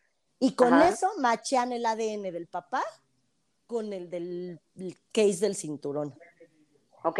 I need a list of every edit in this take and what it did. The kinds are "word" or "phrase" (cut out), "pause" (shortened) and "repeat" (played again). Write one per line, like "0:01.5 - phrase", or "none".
none